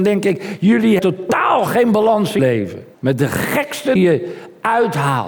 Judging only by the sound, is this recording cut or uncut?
cut